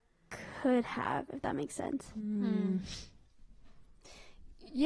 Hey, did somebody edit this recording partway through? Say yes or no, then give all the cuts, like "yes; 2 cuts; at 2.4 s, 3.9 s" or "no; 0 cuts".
no; 0 cuts